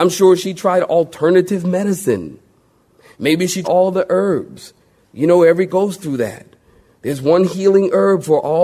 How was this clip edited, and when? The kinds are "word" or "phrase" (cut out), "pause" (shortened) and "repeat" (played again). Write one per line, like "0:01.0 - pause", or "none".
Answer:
0:03.6 - word
0:05.7 - word